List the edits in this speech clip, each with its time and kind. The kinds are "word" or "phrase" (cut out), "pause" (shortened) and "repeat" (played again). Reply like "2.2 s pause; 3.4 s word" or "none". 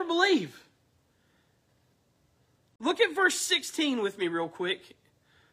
none